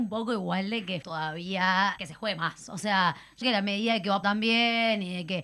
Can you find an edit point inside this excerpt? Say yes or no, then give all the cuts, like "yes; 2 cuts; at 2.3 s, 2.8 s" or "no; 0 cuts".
yes; 4 cuts; at 1.0 s, 2.0 s, 3.4 s, 4.2 s